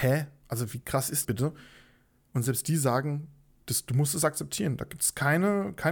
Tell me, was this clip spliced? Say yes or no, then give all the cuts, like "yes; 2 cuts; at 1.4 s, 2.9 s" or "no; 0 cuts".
yes; 1 cut; at 1.2 s